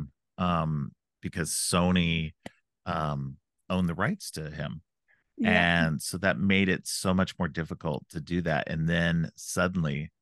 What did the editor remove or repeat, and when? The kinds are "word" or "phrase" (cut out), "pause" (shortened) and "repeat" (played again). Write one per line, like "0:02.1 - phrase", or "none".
none